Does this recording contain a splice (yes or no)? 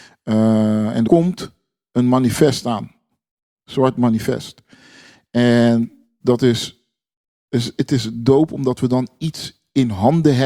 yes